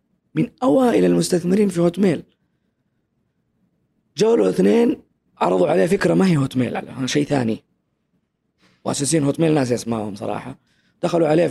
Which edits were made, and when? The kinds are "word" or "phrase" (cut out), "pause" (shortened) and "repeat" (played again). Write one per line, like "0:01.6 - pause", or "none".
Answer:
0:05.1 - pause